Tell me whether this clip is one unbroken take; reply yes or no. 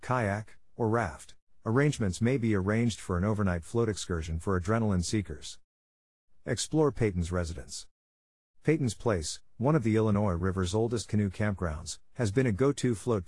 no